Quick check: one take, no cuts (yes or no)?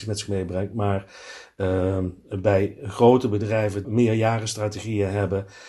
no